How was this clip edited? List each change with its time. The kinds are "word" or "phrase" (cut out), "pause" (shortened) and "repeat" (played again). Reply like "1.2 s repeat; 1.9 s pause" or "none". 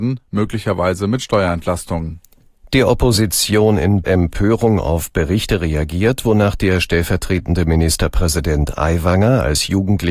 4.0 s phrase